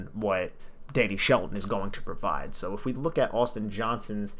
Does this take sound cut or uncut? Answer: uncut